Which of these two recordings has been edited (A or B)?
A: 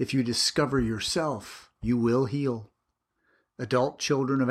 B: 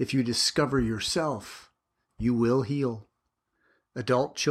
A